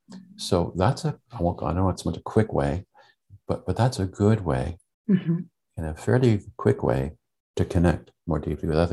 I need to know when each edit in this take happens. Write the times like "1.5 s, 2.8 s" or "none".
1.3 s, 2.0 s